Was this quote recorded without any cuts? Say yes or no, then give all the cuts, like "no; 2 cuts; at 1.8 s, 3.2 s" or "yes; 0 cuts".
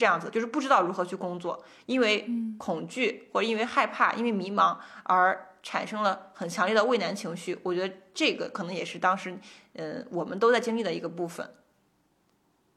yes; 0 cuts